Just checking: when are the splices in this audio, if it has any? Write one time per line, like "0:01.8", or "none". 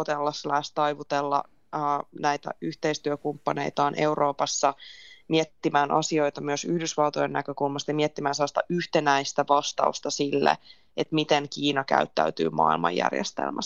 none